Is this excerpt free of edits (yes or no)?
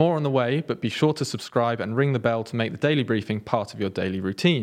yes